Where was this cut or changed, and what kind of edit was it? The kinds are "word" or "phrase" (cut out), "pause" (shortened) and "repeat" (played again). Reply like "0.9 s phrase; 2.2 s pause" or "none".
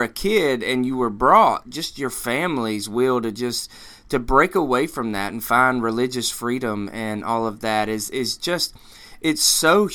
none